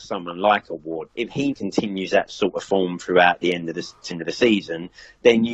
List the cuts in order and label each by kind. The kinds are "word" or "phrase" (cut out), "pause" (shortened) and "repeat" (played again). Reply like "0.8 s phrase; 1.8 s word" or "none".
1.1 s word; 1.5 s word; 4.1 s word